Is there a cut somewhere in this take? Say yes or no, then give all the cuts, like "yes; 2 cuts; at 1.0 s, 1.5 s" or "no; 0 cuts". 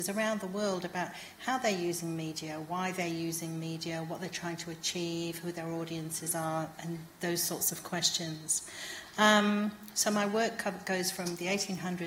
no; 0 cuts